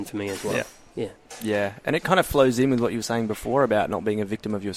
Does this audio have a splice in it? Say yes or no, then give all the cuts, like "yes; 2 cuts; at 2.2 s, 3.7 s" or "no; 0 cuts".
no; 0 cuts